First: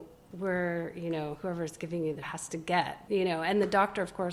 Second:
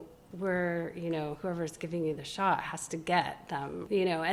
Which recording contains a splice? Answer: first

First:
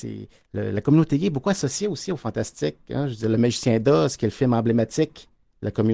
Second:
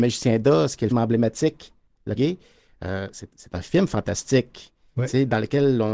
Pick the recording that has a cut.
second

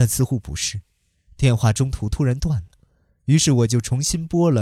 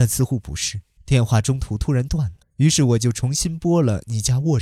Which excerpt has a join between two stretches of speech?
second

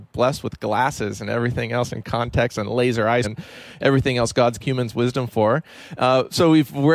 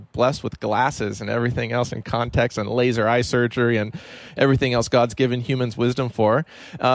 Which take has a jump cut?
first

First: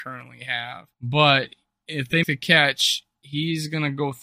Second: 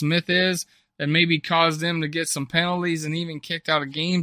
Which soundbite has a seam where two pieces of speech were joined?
first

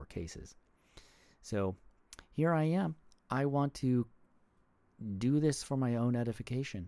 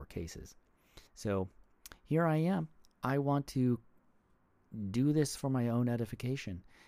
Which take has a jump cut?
second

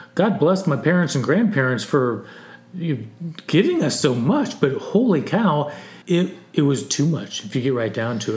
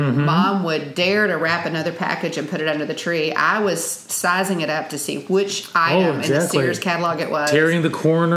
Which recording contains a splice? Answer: first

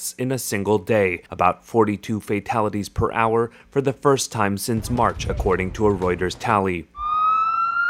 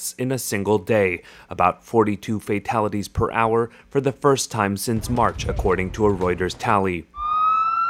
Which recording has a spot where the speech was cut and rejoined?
first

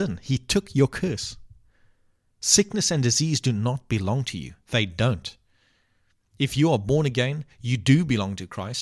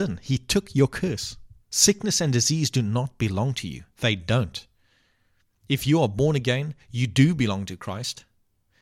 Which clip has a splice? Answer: second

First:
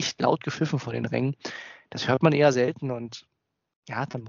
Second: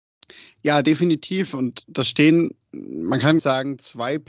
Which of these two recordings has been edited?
second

